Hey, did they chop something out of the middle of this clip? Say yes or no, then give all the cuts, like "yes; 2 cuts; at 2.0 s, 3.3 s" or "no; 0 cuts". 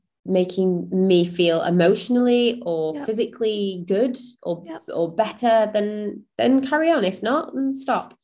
no; 0 cuts